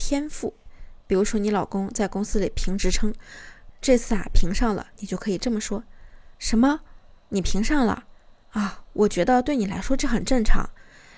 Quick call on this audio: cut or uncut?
uncut